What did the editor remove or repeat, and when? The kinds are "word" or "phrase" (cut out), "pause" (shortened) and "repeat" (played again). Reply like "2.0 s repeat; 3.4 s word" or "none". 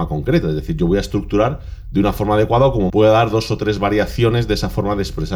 2.9 s word